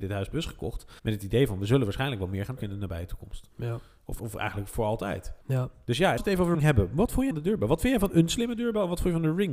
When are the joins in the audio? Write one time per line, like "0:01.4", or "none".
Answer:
0:01.0
0:02.6
0:04.2
0:05.4
0:06.2
0:06.5
0:07.3